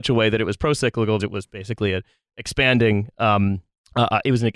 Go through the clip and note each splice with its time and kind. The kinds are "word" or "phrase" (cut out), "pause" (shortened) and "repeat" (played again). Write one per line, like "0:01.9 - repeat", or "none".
0:01.2 - word